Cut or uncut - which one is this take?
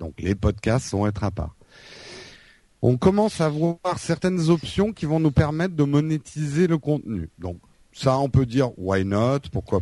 uncut